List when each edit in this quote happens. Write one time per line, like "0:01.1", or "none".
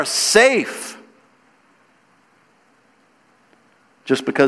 none

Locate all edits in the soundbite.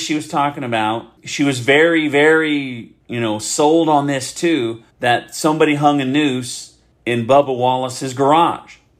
0:01.2
0:03.0
0:04.9
0:06.9

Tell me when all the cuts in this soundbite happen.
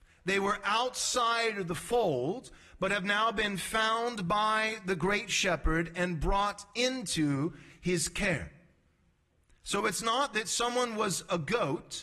none

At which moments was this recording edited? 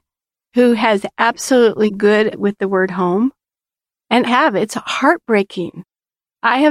0:01.9
0:02.3
0:04.2

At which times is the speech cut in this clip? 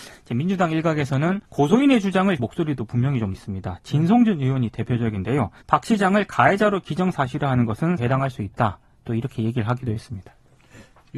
0:01.4
0:02.4
0:03.3
0:05.6
0:08.0

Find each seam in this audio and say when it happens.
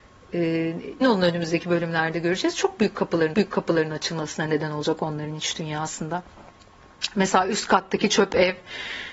0:01.0
0:03.3

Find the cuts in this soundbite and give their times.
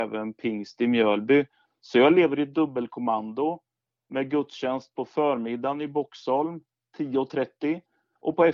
none

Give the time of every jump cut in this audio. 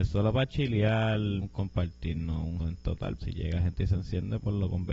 0:01.4
0:02.6
0:03.2

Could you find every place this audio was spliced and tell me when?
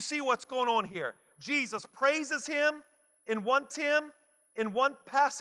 0:03.7

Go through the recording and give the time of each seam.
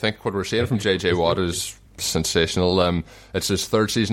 none

